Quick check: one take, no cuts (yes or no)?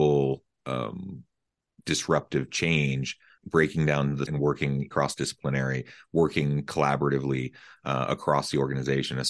no